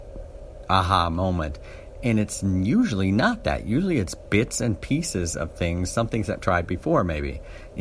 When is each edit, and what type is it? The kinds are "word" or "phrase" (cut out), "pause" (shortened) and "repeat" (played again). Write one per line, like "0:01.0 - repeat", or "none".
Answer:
0:06.4 - word

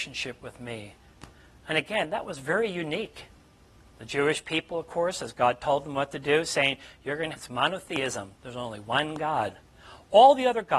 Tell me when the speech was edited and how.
0:07.3 - phrase

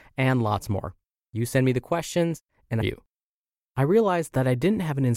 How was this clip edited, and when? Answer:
0:02.8 - phrase

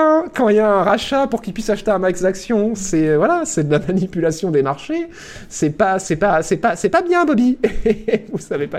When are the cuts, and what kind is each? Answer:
none

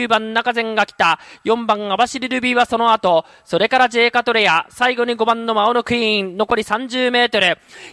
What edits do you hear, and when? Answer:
none

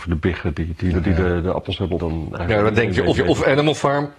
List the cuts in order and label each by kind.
0:00.9 - word
0:02.0 - word
0:03.1 - repeat

